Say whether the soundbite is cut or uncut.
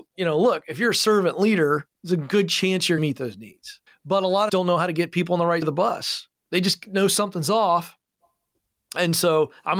cut